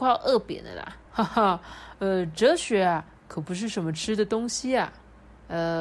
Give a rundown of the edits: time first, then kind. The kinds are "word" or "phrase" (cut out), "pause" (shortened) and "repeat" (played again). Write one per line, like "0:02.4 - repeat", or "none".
0:01.1 - pause